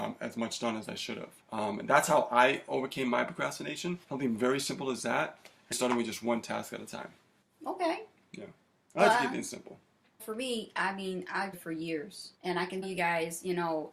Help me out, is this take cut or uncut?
cut